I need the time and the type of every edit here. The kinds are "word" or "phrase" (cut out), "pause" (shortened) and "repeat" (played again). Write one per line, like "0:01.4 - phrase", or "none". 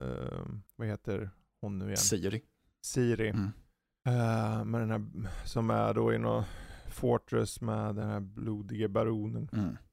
none